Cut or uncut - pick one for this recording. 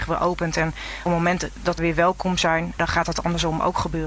cut